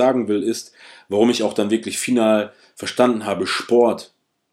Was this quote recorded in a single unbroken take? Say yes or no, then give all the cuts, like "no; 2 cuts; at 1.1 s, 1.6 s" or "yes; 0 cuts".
yes; 0 cuts